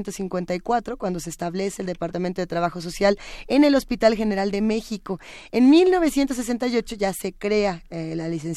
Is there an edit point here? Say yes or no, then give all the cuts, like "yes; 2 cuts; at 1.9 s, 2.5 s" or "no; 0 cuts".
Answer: no; 0 cuts